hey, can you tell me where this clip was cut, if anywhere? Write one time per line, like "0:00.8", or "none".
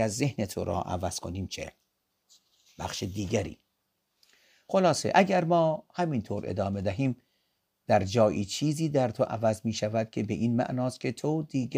none